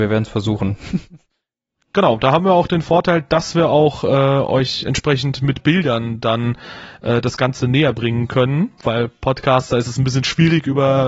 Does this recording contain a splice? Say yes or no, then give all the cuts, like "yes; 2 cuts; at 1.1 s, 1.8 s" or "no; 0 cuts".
no; 0 cuts